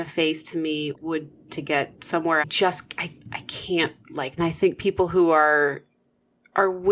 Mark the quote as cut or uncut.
cut